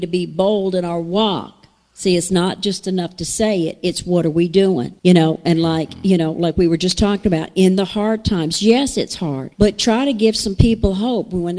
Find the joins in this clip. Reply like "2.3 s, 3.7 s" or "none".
5.0 s, 9.5 s